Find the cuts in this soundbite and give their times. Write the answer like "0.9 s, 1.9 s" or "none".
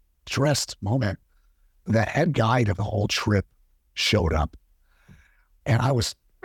none